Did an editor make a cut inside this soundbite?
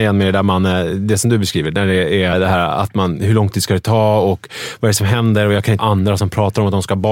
yes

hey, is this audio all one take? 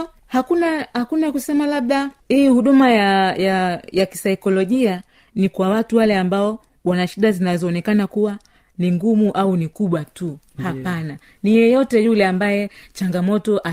yes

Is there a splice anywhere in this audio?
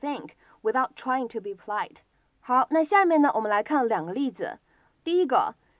yes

